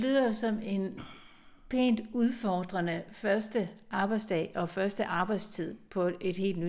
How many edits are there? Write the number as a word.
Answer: zero